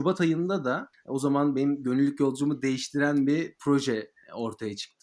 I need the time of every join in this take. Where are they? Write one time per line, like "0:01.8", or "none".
none